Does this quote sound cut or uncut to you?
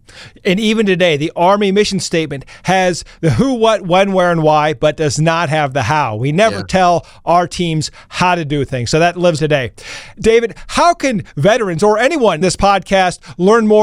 cut